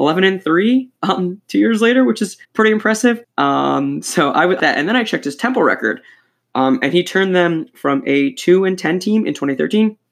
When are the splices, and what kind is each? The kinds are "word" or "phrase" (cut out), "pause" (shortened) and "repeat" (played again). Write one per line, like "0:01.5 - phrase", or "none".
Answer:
0:02.4 - pause
0:03.2 - pause
0:04.6 - phrase